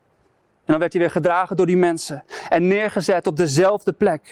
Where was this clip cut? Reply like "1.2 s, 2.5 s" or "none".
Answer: none